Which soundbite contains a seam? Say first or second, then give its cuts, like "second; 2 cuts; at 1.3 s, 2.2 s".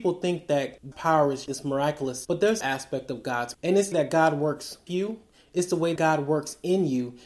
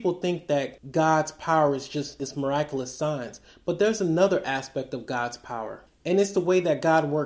first; 8 cuts; at 0.9 s, 1.5 s, 2.2 s, 2.6 s, 3.5 s, 3.9 s, 4.9 s, 6.0 s